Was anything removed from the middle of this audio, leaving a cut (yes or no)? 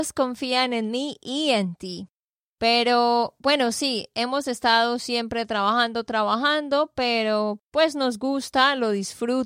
no